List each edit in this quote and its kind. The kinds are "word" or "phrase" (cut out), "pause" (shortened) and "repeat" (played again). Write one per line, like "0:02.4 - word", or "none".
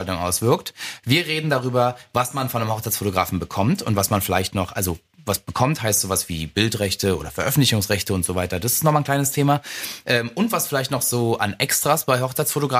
none